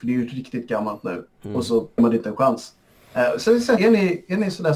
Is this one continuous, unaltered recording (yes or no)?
no